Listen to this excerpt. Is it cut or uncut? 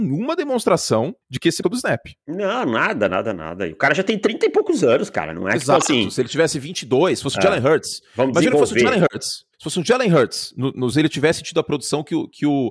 cut